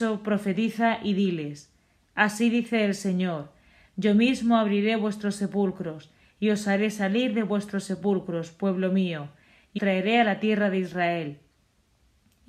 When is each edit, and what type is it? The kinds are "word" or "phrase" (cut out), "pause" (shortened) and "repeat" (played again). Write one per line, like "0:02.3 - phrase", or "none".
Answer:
0:09.8 - word